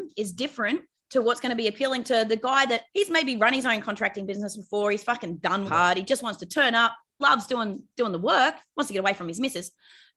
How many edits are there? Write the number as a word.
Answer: three